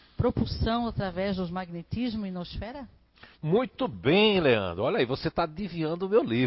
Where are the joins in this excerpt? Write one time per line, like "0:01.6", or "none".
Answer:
0:03.3